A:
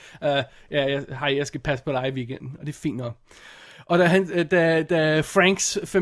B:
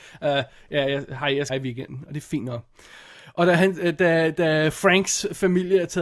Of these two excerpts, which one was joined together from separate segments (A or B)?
B